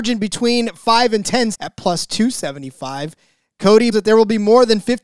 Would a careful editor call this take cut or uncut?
cut